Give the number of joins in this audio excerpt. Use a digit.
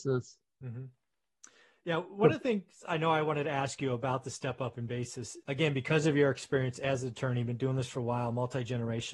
1